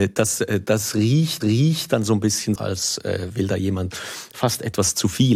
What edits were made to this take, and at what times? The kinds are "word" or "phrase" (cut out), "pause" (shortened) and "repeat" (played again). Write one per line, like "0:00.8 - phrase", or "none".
0:01.4 - repeat
0:02.6 - word
0:03.9 - word